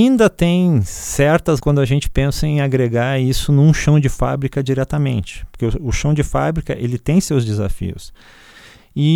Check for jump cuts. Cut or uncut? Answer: cut